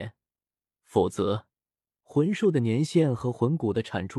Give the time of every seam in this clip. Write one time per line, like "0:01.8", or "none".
none